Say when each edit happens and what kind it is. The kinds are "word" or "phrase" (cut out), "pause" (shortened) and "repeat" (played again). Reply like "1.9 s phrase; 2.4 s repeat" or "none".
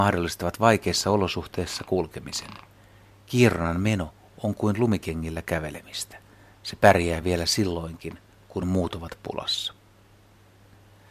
none